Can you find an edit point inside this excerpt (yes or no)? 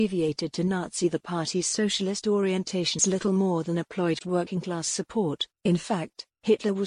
yes